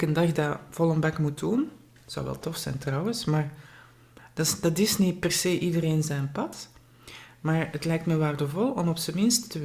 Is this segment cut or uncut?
uncut